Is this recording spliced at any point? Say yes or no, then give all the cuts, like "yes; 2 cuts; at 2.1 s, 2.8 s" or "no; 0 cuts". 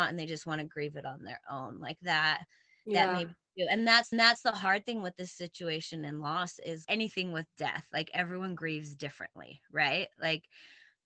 yes; 2 cuts; at 4.1 s, 6.8 s